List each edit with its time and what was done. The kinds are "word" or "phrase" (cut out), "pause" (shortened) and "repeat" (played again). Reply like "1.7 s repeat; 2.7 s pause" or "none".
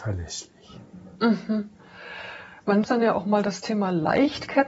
1.2 s pause; 2.8 s word